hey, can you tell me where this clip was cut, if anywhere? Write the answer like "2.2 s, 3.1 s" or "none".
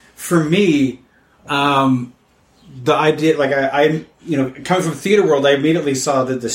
none